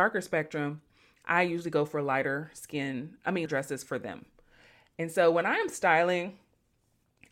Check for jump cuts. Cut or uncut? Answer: cut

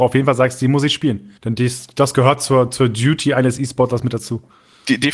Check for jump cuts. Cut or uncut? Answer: cut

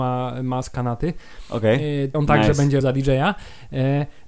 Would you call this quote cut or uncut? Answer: cut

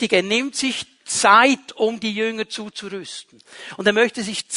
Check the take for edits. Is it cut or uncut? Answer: uncut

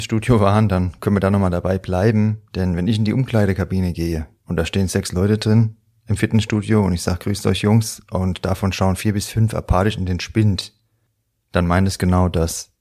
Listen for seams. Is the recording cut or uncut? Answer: uncut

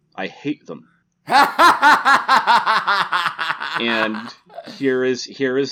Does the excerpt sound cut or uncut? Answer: uncut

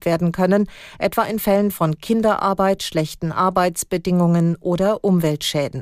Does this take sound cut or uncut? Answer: uncut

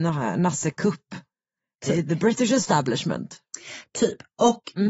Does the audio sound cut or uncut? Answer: uncut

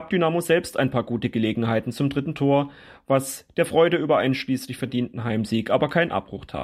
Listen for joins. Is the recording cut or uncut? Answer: uncut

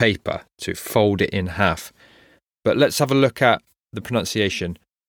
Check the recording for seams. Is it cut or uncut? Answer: uncut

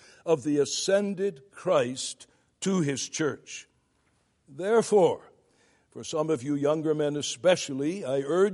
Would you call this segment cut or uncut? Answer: uncut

